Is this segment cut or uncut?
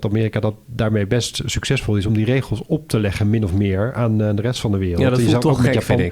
uncut